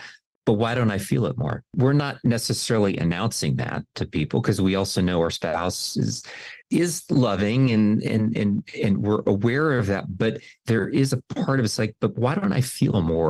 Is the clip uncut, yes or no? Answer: no